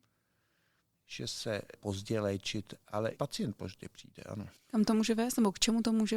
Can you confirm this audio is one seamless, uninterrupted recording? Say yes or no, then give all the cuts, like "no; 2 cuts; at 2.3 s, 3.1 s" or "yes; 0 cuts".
no; 3 cuts; at 1.7 s, 3.2 s, 4.6 s